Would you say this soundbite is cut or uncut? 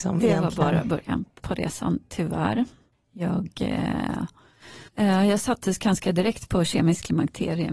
cut